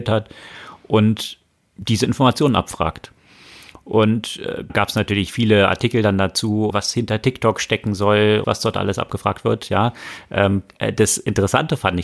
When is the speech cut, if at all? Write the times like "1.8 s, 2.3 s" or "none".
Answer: 4.7 s, 6.7 s, 8.4 s